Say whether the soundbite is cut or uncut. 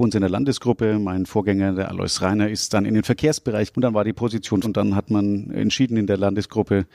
cut